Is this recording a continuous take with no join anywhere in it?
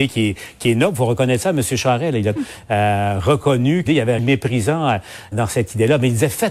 no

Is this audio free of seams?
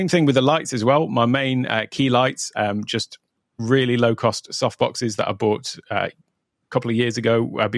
no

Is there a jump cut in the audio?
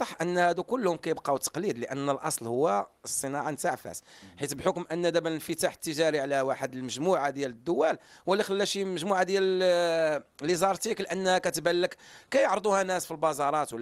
no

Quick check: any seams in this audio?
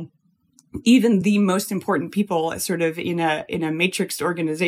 no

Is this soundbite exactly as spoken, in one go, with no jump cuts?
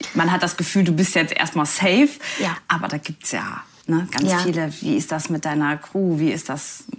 no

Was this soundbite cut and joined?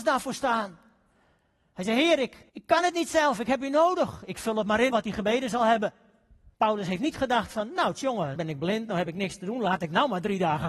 yes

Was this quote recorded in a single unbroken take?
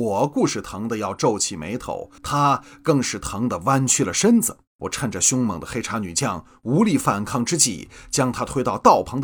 no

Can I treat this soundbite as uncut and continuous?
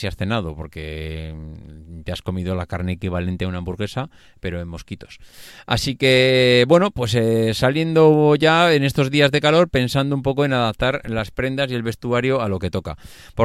yes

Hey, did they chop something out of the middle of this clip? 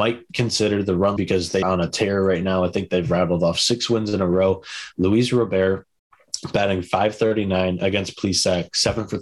yes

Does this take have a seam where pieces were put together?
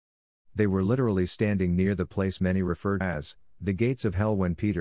yes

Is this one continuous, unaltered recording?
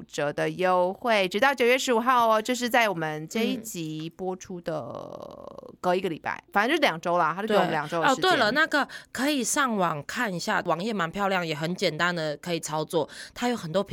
no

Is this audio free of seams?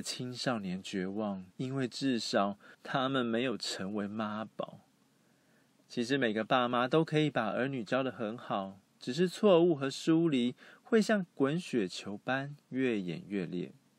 no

